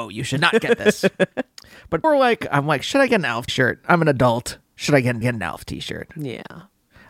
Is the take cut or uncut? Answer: cut